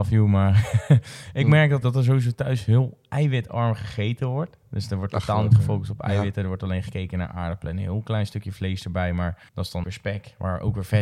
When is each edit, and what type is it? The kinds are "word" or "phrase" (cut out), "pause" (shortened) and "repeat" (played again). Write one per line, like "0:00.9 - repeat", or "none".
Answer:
0:01.8 - word
0:09.5 - pause
0:09.8 - word